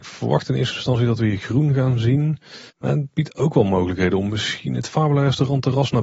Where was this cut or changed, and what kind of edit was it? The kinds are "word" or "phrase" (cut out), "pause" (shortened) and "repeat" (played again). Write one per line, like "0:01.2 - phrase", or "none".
0:02.7 - pause